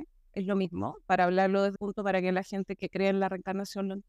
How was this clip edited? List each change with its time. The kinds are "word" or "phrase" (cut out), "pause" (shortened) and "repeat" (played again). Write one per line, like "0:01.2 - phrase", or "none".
0:01.8 - word